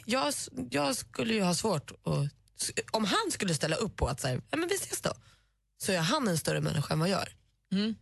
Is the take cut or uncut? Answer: uncut